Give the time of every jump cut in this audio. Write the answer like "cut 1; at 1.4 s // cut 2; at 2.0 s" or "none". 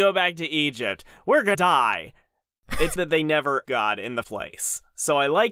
cut 1; at 1.5 s // cut 2; at 3.0 s // cut 3; at 3.7 s // cut 4; at 4.2 s